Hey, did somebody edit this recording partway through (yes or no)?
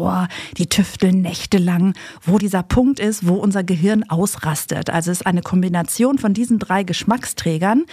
yes